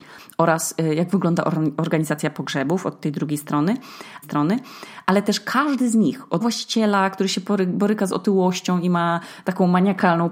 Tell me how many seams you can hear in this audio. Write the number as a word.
two